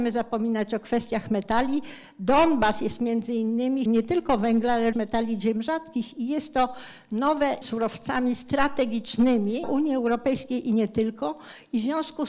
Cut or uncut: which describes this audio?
cut